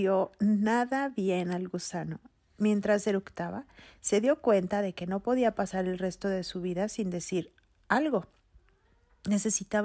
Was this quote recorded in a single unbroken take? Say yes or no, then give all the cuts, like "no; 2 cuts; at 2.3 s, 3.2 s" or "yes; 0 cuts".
yes; 0 cuts